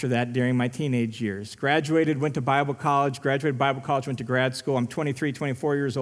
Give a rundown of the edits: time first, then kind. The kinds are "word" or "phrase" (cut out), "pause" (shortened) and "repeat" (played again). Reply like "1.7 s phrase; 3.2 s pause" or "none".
none